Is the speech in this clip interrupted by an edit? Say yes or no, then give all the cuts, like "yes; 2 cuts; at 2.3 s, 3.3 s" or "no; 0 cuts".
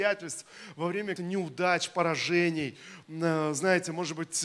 yes; 1 cut; at 1.2 s